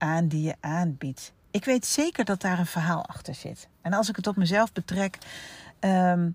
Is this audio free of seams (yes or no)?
yes